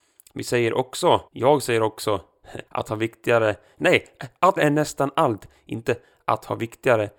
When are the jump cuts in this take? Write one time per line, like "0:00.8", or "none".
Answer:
0:01.3
0:02.7
0:04.6